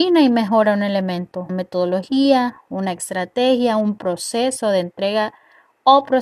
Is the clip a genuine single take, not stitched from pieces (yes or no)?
no